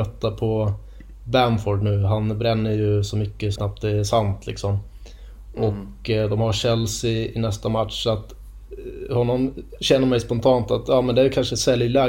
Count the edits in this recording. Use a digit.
1